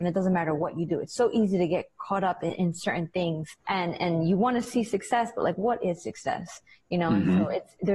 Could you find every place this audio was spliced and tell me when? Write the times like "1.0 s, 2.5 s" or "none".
3.6 s